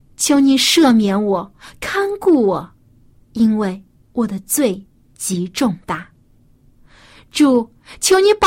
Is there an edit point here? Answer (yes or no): no